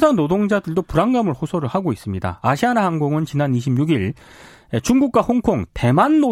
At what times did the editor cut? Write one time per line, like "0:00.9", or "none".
none